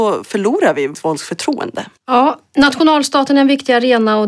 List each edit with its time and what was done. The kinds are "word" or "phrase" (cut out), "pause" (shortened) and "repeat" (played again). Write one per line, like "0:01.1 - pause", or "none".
0:00.9 - word
0:02.0 - pause